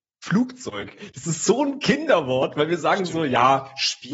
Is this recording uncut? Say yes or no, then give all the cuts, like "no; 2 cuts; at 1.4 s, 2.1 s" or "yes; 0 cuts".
yes; 0 cuts